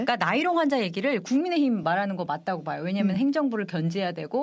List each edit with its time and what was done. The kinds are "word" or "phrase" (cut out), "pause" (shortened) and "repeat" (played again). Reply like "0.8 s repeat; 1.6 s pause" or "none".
none